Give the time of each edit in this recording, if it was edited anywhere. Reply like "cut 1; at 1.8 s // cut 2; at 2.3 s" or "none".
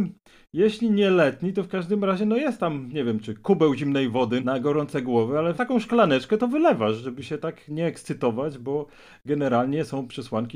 none